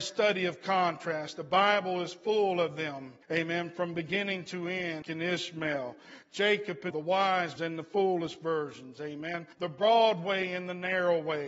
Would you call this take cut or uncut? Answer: cut